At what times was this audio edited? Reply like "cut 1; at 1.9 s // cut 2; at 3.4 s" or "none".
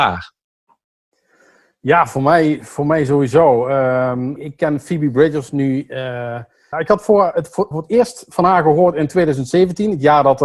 cut 1; at 4.4 s // cut 2; at 6.7 s // cut 3; at 7.7 s

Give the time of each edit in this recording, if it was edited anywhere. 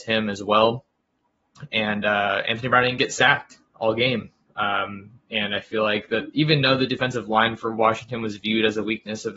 none

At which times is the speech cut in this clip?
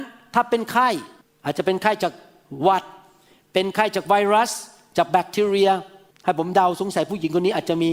none

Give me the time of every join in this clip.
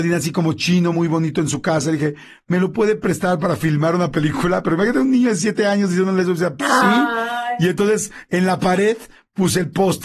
none

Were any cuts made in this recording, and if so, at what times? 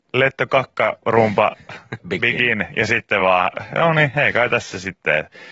none

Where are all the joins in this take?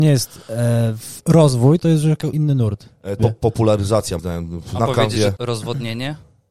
cut 1; at 1.8 s // cut 2; at 2.3 s // cut 3; at 3.2 s // cut 4; at 4.2 s // cut 5; at 4.8 s // cut 6; at 5.4 s

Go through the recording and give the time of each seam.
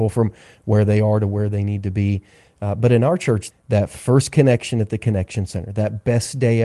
cut 1; at 3.5 s

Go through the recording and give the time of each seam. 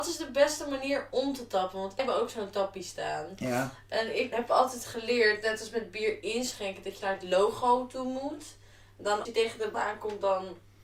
cut 1; at 2.0 s // cut 2; at 4.3 s // cut 3; at 7.0 s // cut 4; at 9.3 s // cut 5; at 9.7 s

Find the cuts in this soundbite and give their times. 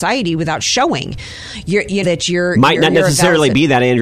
cut 1; at 2.0 s

